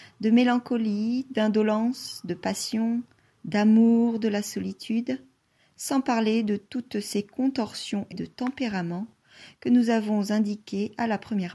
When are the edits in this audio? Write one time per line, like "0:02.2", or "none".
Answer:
0:08.1